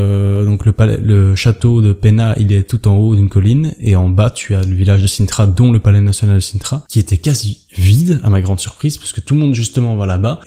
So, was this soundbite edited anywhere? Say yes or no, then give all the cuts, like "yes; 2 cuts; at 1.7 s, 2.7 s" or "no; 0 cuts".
no; 0 cuts